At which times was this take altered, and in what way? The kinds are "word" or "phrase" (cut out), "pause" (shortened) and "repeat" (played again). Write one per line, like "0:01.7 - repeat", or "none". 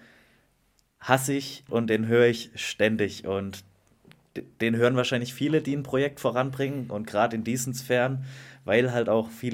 0:01.7 - phrase